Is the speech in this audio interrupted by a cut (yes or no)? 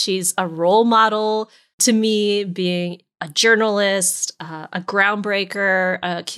no